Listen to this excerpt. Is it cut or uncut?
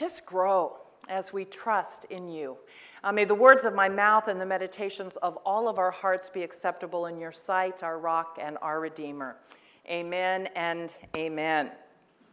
uncut